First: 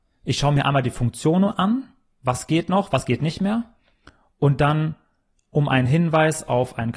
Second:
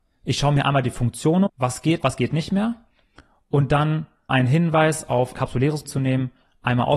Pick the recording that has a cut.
second; 5 cuts; at 1.5 s, 2.0 s, 4.3 s, 5.3 s, 5.8 s

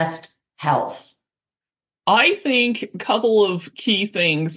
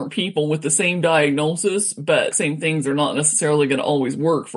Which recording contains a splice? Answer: second; 1 cut; at 2.3 s

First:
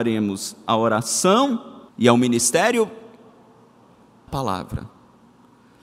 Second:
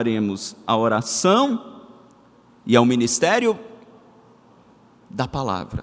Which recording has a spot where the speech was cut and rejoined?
first; 2 cuts; at 1.9 s, 4.3 s

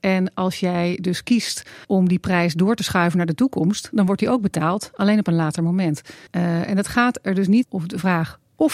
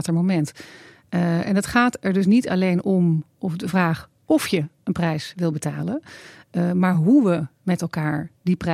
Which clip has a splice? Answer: first; 3 cuts; at 1.8 s, 6.3 s, 7.6 s

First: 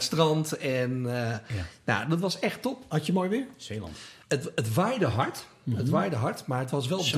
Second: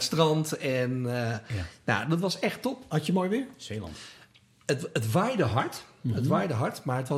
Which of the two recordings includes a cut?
first; 1 cut; at 4.2 s

